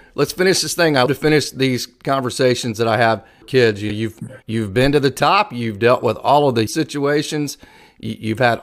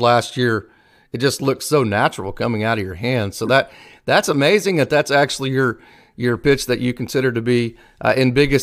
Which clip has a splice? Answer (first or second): first